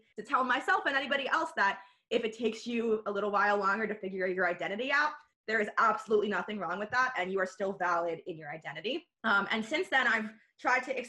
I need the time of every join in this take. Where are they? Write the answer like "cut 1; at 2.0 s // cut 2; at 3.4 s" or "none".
none